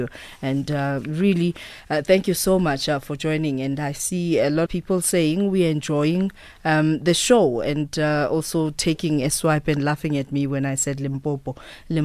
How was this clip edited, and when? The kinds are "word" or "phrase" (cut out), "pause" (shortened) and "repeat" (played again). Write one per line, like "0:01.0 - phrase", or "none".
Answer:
0:04.7 - phrase